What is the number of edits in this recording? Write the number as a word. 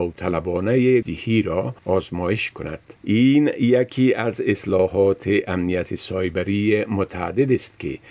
three